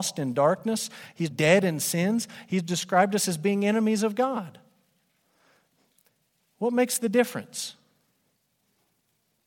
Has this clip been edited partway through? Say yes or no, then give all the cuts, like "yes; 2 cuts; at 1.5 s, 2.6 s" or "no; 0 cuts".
yes; 1 cut; at 1.3 s